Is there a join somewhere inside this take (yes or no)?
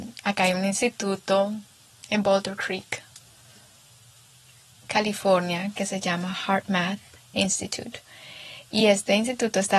no